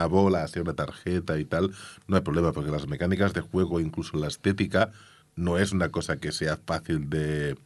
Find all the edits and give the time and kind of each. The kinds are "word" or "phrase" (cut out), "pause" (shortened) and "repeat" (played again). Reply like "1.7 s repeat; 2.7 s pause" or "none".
none